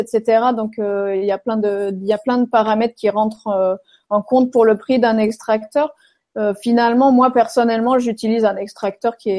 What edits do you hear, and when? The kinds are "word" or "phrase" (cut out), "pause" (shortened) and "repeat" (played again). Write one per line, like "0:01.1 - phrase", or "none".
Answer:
none